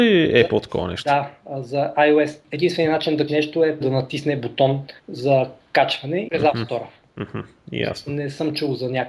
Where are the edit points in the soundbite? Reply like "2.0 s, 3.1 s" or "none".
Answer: 2.4 s, 3.3 s, 3.8 s, 5.0 s, 6.3 s, 7.0 s